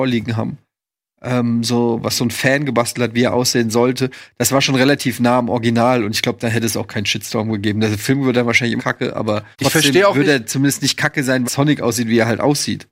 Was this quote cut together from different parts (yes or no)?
yes